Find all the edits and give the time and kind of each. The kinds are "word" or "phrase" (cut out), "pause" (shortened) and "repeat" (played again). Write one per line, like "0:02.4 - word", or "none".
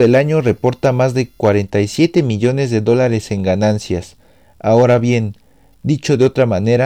none